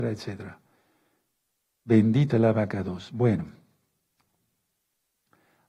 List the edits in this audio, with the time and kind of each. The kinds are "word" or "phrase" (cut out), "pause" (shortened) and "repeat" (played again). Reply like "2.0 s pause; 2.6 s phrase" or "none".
2.3 s word